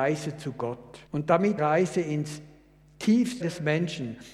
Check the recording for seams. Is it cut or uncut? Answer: cut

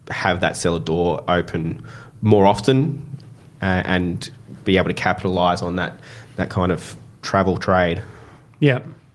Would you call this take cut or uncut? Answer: uncut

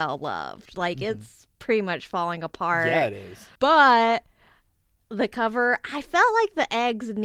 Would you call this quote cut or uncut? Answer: cut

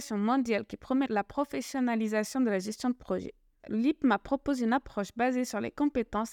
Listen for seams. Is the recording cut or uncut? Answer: uncut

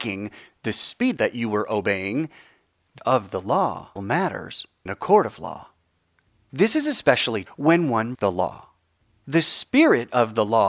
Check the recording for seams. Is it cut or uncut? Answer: cut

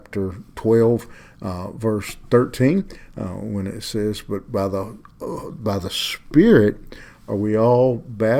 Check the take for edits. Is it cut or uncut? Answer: uncut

